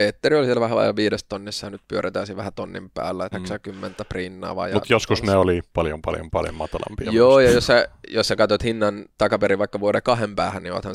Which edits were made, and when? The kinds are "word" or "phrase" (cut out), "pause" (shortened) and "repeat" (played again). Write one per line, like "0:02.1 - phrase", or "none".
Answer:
0:03.3 - word
0:05.7 - pause